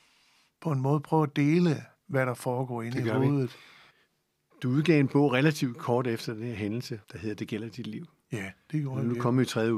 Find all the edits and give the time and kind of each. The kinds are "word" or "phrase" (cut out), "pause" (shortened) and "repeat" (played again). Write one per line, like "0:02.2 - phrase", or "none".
0:07.0 - pause

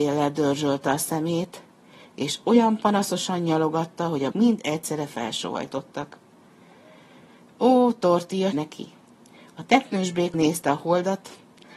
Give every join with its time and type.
0:04.3 - word
0:08.5 - word
0:10.3 - word

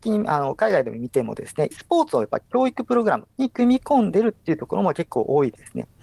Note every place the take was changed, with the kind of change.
0:01.7 - word
0:03.3 - pause

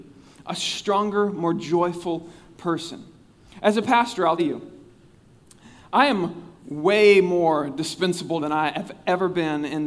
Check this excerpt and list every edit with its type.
0:04.4 - word
0:08.4 - word

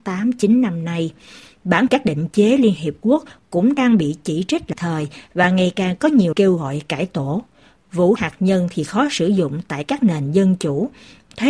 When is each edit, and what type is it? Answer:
0:01.9 - word
0:04.7 - word
0:06.3 - word
0:08.2 - word

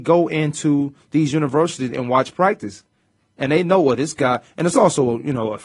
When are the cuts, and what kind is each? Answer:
none

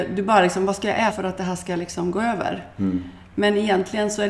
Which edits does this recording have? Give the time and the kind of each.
0:01.1 - word

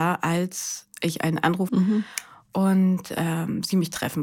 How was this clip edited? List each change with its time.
0:01.7 - phrase

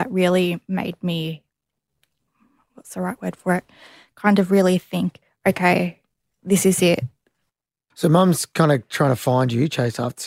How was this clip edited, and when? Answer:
none

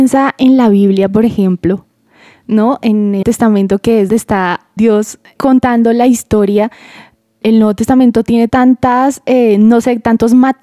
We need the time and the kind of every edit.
0:03.2 - word
0:04.1 - word
0:04.8 - word
0:05.4 - word
0:07.4 - word
0:08.5 - word

